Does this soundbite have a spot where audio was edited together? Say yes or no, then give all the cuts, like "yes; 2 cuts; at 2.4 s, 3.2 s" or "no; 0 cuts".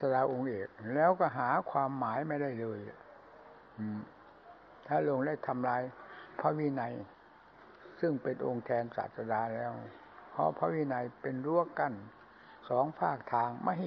no; 0 cuts